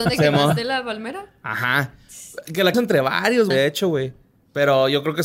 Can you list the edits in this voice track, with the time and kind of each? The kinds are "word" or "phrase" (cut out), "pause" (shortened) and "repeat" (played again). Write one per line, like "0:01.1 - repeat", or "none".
0:02.7 - word
0:03.5 - word

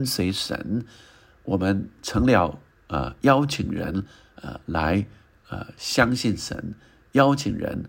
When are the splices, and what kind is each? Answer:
none

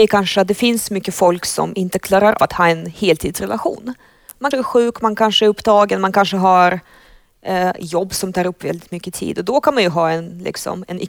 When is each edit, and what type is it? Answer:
0:02.4 - word
0:04.5 - word

